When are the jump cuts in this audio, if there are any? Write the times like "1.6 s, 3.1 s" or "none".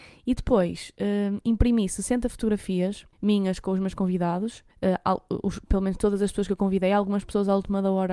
3.1 s, 4.7 s